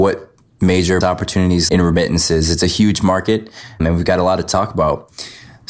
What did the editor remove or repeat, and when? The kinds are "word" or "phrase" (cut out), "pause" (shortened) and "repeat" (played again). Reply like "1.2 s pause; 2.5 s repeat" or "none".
1.0 s word; 1.7 s word; 3.8 s word